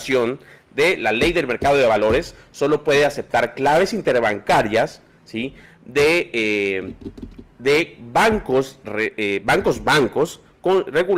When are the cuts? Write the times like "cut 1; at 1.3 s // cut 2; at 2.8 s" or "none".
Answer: none